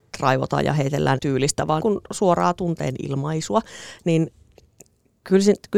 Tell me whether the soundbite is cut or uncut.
cut